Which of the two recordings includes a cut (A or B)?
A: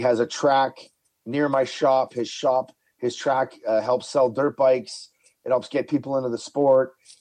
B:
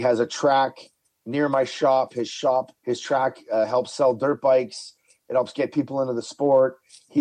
B